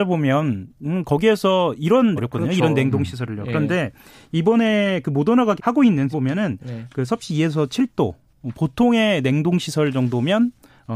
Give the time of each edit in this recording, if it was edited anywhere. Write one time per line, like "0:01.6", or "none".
0:02.2
0:05.6
0:06.1